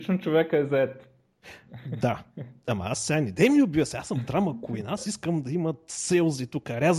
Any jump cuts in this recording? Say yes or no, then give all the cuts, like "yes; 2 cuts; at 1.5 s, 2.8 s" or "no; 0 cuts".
yes; 1 cut; at 2.6 s